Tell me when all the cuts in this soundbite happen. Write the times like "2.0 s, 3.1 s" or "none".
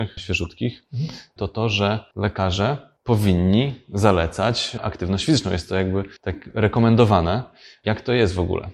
3.0 s, 6.2 s